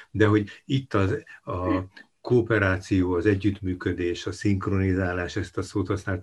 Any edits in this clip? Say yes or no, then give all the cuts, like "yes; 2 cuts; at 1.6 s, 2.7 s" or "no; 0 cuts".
no; 0 cuts